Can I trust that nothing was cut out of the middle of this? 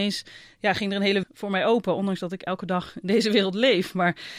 no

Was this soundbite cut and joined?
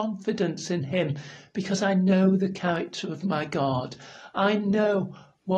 no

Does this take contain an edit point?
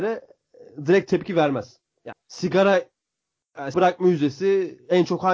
yes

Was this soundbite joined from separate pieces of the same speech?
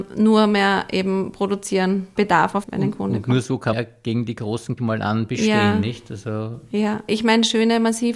yes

